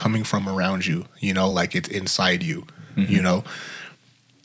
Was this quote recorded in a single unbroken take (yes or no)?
yes